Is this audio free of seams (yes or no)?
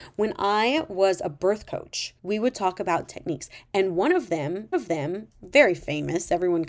no